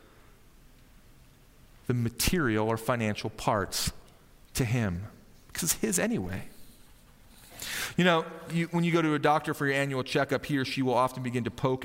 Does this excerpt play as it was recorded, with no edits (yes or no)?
yes